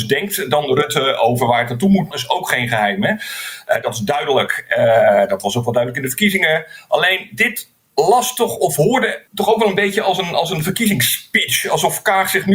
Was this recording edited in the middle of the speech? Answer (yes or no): yes